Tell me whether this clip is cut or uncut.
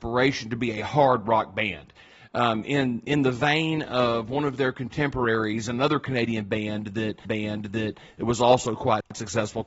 cut